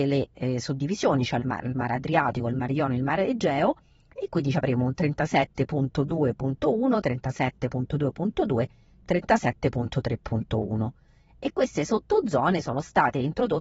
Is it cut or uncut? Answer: uncut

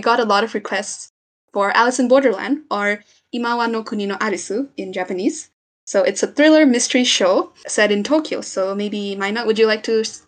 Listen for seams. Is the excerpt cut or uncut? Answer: uncut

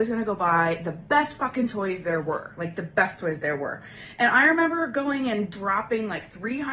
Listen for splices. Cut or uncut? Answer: uncut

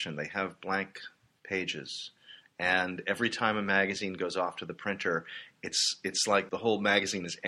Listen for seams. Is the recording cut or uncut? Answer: uncut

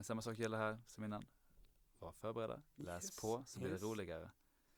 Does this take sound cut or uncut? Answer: uncut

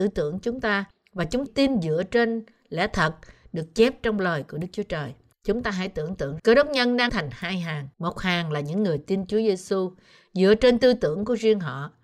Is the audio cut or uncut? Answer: cut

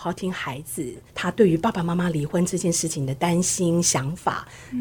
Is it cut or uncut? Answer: cut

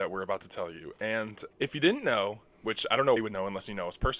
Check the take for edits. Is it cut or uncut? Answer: cut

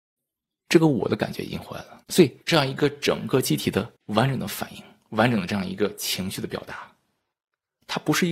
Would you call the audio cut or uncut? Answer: cut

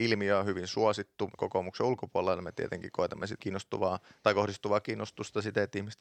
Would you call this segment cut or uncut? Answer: cut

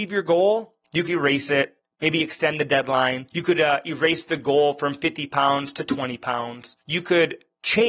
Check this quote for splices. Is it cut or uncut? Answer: cut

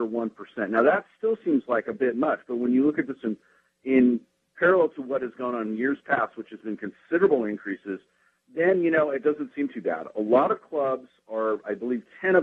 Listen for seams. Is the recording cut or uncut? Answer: uncut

